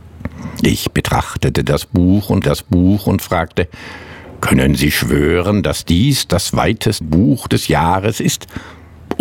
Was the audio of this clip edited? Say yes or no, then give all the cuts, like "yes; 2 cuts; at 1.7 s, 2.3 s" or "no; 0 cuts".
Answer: yes; 2 cuts; at 2.4 s, 7.0 s